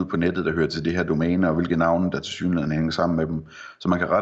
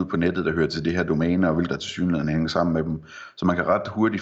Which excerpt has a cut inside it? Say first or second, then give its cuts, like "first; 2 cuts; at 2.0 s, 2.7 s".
second; 1 cut; at 1.7 s